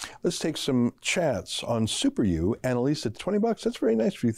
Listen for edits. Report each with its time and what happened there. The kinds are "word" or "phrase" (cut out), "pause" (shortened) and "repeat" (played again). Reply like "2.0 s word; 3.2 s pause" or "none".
1.0 s pause; 3.1 s word